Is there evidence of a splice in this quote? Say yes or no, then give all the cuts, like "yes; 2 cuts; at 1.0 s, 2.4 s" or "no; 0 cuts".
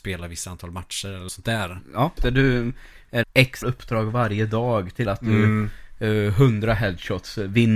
yes; 5 cuts; at 1.3 s, 2.2 s, 3.2 s, 3.6 s, 5.0 s